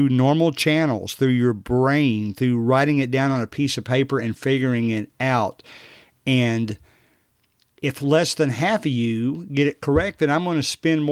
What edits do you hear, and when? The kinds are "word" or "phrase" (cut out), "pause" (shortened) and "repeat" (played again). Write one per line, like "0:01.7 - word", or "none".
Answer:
none